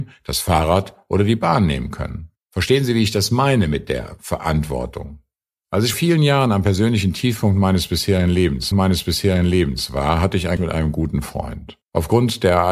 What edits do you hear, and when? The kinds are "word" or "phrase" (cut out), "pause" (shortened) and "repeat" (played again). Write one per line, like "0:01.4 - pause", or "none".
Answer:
0:02.4 - pause
0:05.9 - word
0:08.7 - repeat
0:10.6 - word
0:11.8 - pause